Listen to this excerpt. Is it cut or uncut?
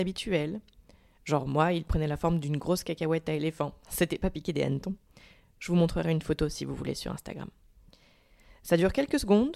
uncut